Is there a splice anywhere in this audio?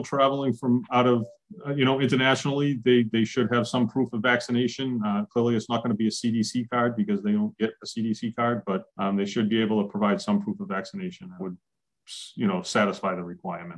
yes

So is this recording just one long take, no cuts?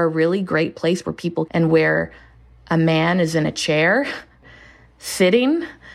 no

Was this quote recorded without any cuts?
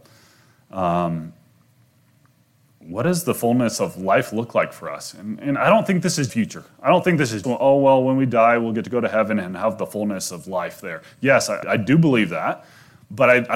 no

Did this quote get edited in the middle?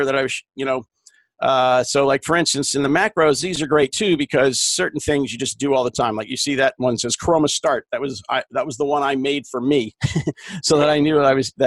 no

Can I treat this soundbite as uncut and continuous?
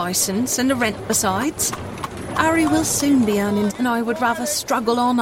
no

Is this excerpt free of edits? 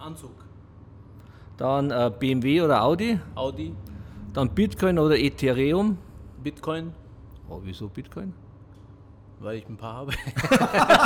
yes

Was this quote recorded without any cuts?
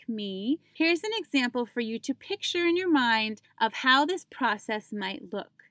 yes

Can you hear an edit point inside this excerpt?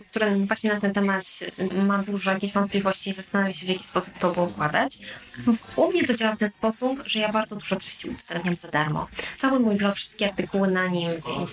no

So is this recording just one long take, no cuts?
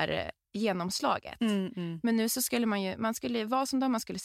yes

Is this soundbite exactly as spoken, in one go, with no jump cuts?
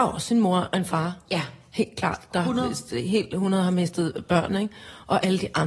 yes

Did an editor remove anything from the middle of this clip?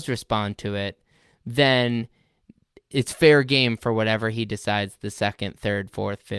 no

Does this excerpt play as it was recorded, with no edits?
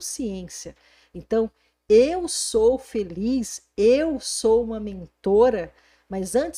yes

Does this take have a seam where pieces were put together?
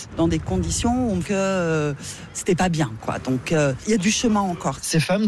yes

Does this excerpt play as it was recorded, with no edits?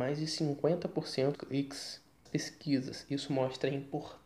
no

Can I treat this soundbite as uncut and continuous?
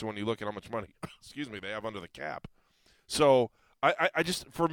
yes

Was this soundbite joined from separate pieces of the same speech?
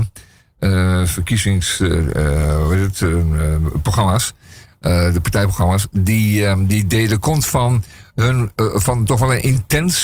no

